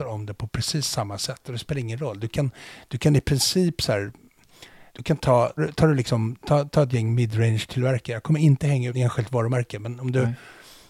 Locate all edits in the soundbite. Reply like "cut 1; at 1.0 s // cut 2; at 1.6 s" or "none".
cut 1; at 4.9 s // cut 2; at 5.6 s // cut 3; at 8.9 s